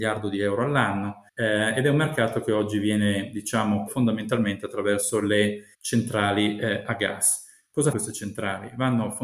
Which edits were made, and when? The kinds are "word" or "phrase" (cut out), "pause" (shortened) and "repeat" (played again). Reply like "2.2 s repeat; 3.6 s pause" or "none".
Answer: 1.3 s pause; 3.9 s word; 5.7 s pause; 7.9 s word